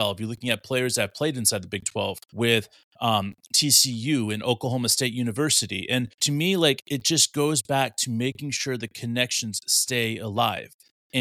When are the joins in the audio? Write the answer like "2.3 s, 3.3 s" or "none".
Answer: 2.2 s, 6.1 s